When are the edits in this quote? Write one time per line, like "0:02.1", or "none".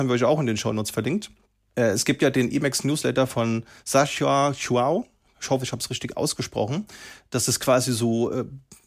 none